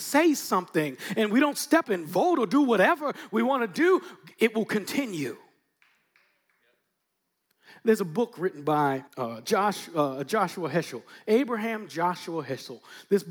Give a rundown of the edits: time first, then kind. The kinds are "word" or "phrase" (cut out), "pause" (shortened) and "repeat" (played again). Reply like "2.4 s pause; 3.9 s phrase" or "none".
1.8 s word; 9.1 s pause